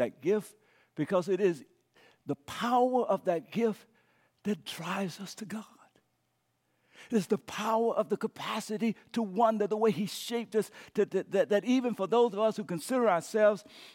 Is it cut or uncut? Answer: uncut